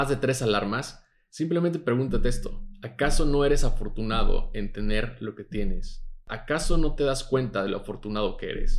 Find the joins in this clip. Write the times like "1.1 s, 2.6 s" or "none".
none